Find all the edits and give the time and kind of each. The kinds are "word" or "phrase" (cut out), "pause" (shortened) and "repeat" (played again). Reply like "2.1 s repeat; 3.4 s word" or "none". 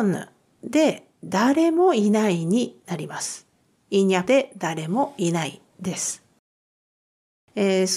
3.6 s pause; 4.2 s word